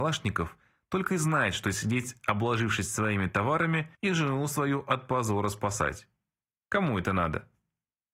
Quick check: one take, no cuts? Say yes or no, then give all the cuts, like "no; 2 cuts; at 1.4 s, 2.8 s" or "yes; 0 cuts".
no; 1 cut; at 3.9 s